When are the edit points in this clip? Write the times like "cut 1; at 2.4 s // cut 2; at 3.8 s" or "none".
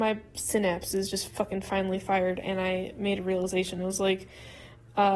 none